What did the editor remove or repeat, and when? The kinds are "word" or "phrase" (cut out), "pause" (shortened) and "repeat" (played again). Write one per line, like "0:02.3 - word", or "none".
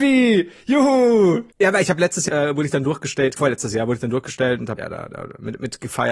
0:01.5 - pause
0:02.3 - word
0:03.4 - word
0:04.8 - phrase